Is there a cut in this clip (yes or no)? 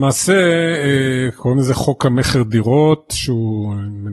no